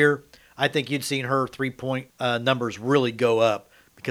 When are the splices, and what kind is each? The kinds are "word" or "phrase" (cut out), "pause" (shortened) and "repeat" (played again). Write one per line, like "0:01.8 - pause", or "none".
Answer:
0:02.1 - pause